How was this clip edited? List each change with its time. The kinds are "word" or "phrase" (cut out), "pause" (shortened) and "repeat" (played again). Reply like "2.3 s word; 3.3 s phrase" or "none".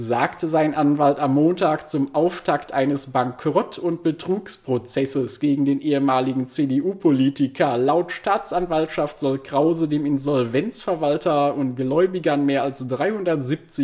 none